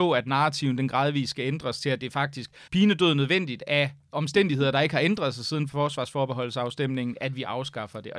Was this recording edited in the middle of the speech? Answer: yes; 2 cuts; at 2.7 s, 5.7 s

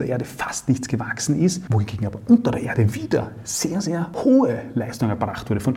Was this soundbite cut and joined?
no; 0 cuts

